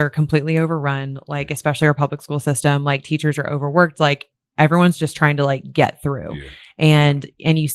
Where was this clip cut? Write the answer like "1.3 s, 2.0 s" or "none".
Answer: none